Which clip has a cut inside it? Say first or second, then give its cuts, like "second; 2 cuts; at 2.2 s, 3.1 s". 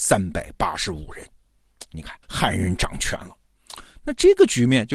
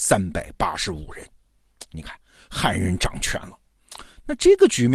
first; 1 cut; at 2.2 s